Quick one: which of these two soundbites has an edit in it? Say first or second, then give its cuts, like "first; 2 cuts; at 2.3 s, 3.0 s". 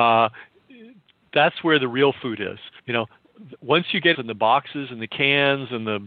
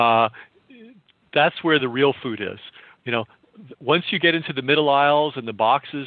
first; 2 cuts; at 2.8 s, 4.1 s